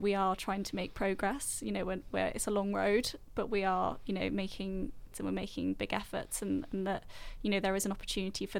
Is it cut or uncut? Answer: cut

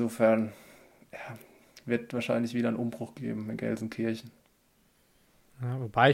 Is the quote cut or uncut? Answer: uncut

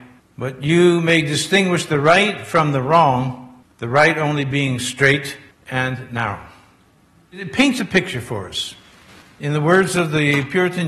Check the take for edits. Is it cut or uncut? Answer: uncut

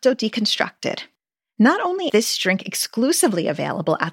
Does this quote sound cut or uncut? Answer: cut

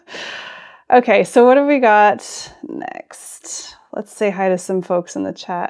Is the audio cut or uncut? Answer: uncut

